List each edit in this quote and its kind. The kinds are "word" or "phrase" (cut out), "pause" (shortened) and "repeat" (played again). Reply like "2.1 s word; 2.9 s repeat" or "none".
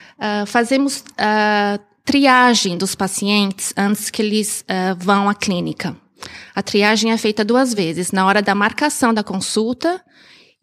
none